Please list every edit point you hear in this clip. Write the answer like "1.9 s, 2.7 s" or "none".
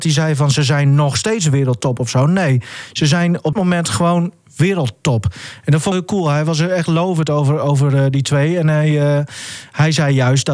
3.5 s, 5.9 s